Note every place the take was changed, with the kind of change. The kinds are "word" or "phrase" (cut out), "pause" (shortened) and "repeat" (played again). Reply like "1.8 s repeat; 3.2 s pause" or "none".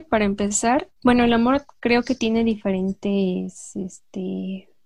1.0 s pause